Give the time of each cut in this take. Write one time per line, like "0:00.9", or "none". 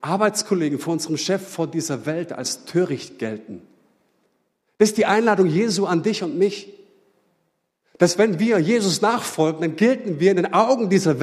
none